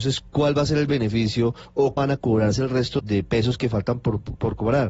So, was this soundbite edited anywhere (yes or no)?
yes